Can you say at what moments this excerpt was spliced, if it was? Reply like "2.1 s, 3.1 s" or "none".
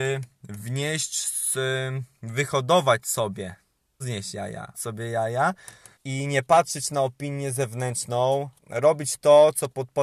4.0 s, 4.7 s, 5.9 s, 8.6 s